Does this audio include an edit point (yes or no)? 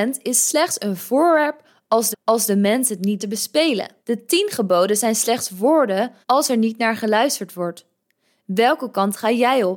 yes